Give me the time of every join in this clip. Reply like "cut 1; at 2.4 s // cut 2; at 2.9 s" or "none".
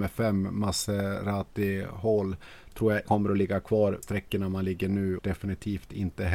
cut 1; at 3.1 s // cut 2; at 4.0 s // cut 3; at 5.2 s